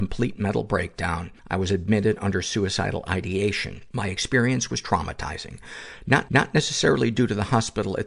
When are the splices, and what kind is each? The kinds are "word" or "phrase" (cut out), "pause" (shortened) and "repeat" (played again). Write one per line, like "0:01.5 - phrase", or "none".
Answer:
0:01.4 - pause
0:03.9 - pause
0:06.3 - repeat